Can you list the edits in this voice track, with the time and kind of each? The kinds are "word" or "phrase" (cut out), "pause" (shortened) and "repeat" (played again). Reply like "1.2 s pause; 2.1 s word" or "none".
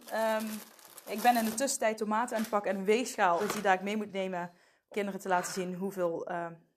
2.0 s word; 3.4 s word; 4.9 s word